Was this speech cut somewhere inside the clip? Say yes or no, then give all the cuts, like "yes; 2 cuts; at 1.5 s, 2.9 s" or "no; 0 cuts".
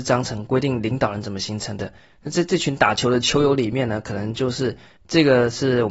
yes; 1 cut; at 5.0 s